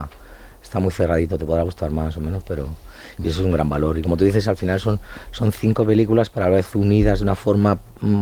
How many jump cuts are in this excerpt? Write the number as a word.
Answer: zero